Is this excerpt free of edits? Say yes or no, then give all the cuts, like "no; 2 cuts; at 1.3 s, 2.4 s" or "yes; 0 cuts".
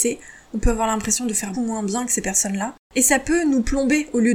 no; 2 cuts; at 1.5 s, 2.8 s